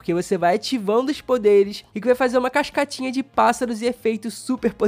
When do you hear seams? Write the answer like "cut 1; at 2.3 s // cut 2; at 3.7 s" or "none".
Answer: cut 1; at 1.9 s